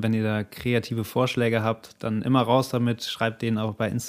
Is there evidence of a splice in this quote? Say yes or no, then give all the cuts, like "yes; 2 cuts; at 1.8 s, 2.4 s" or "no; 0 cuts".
no; 0 cuts